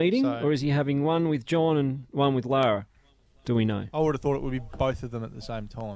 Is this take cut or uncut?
uncut